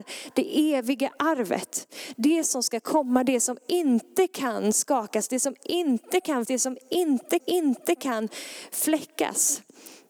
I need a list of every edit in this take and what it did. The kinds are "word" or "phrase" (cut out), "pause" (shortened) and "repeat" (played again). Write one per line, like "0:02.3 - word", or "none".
0:06.4 - word
0:07.4 - repeat